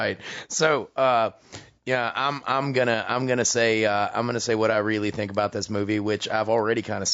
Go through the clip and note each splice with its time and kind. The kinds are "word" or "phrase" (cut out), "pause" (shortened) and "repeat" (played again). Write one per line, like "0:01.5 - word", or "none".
none